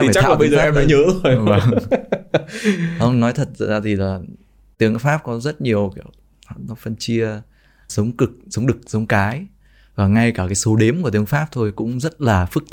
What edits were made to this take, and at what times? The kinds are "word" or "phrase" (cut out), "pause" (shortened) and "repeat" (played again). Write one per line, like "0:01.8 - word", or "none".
0:07.9 - word